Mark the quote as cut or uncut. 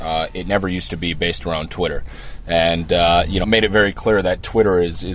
cut